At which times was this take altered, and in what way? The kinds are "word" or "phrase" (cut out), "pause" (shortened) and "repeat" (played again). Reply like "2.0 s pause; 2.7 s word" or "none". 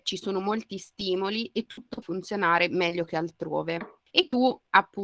2.0 s word